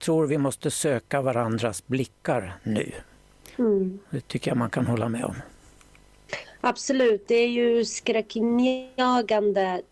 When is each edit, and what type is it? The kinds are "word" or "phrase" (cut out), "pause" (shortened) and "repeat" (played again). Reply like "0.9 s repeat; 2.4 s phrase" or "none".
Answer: 3.5 s pause

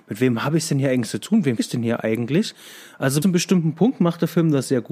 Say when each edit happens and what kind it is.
1.6 s word; 3.2 s word

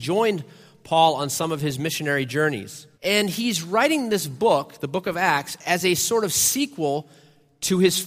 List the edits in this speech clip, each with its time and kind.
3.0 s pause

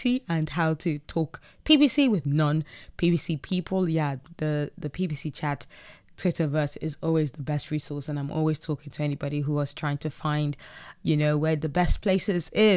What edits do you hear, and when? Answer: none

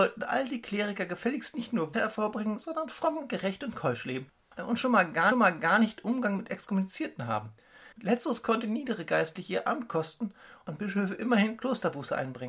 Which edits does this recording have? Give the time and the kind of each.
1.9 s word; 5.3 s repeat; 7.9 s pause

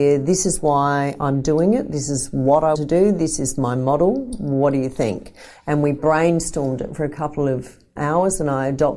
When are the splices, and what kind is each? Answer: 2.7 s word; 8.0 s word

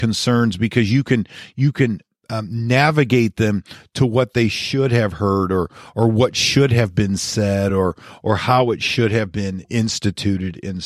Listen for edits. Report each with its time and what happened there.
none

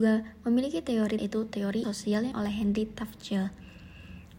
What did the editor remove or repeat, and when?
1.2 s word; 1.8 s word; 2.3 s word

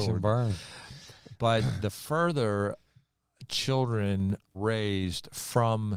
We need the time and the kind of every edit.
4.5 s word

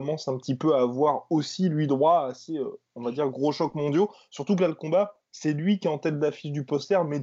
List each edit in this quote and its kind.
none

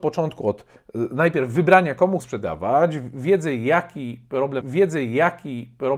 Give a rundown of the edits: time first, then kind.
2.2 s word; 4.6 s repeat

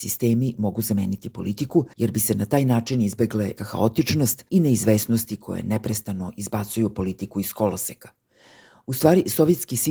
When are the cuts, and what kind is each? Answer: 1.9 s pause; 3.6 s word; 4.5 s pause

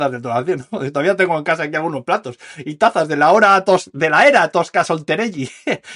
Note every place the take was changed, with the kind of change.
none

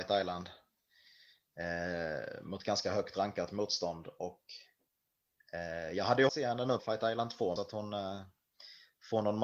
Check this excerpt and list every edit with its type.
6.3 s word; 6.8 s word; 7.6 s phrase

